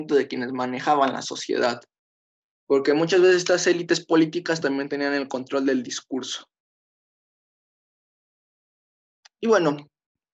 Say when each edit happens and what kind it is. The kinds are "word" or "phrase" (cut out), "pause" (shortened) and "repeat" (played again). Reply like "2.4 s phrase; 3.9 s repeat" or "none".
none